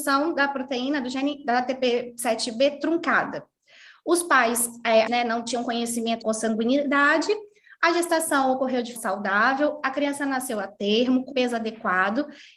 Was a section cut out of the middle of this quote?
yes; 4 cuts; at 5.1 s, 6.2 s, 9.0 s, 11.3 s

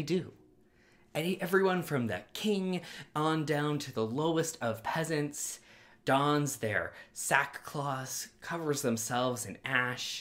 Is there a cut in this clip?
no; 0 cuts

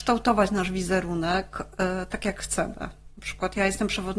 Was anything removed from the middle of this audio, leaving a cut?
no; 0 cuts

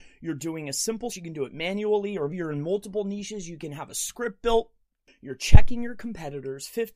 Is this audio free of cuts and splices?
no; 2 cuts; at 1.1 s, 2.3 s

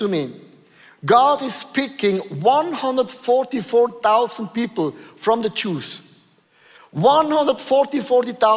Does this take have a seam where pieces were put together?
no; 0 cuts

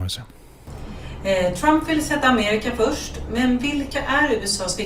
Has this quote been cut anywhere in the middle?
no; 0 cuts

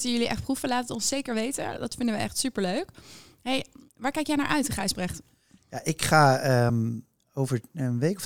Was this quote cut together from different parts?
no; 0 cuts

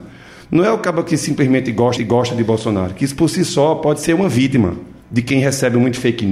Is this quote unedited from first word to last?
no; 2 cuts; at 2.0 s, 5.0 s

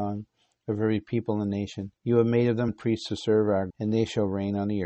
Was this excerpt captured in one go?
no; 3 cuts; at 2.0 s, 2.7 s, 3.7 s

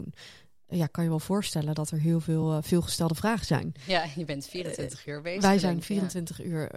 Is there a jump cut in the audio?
no; 0 cuts

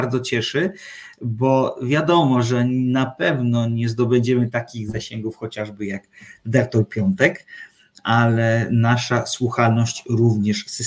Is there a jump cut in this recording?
no; 0 cuts

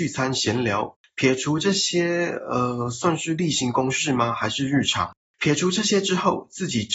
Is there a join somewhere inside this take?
no; 0 cuts

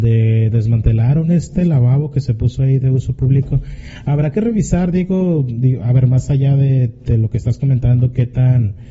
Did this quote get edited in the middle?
no; 0 cuts

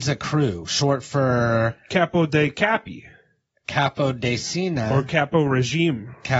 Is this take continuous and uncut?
yes; 0 cuts

